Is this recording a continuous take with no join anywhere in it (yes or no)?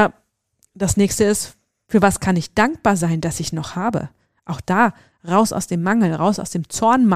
yes